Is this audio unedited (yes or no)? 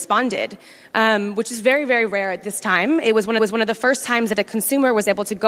no